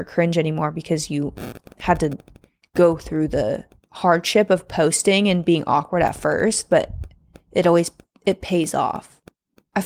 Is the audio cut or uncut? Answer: uncut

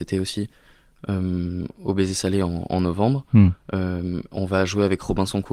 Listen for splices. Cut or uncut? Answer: cut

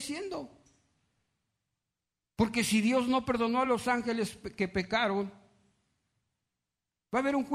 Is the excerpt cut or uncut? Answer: uncut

